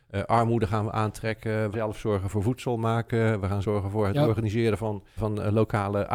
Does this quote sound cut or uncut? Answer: cut